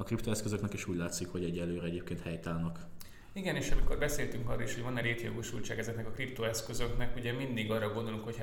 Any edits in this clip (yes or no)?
no